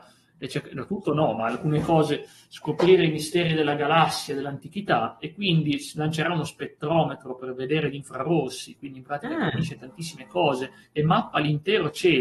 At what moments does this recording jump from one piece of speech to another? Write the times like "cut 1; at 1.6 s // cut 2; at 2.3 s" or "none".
none